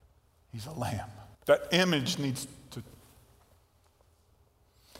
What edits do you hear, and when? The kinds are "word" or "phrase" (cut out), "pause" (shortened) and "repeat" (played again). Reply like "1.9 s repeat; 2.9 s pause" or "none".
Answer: 1.3 s pause